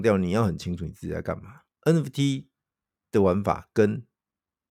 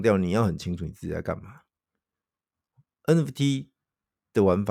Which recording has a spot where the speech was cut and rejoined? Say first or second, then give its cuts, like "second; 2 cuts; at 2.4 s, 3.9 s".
first; 1 cut; at 1.7 s